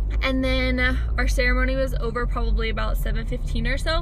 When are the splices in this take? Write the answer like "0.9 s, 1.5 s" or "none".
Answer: none